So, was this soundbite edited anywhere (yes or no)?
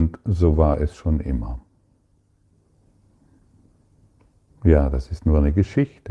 no